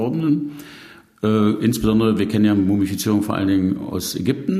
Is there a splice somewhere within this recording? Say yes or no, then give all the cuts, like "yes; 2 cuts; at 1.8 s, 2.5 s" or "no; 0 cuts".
no; 0 cuts